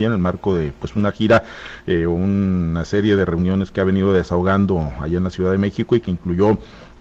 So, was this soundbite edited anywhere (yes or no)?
no